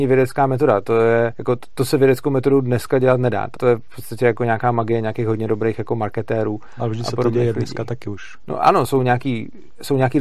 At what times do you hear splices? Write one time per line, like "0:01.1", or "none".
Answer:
0:01.3
0:03.6